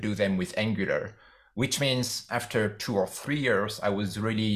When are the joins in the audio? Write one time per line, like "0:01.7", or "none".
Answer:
none